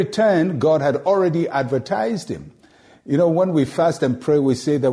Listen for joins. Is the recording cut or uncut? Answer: uncut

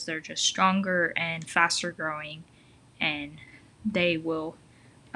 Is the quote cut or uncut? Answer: uncut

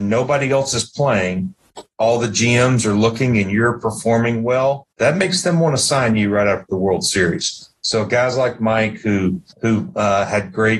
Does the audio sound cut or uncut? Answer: cut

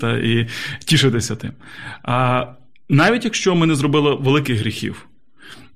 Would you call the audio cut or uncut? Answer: uncut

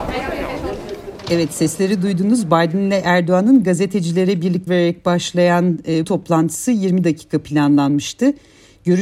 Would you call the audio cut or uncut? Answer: cut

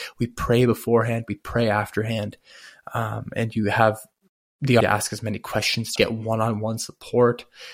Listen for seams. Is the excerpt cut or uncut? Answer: cut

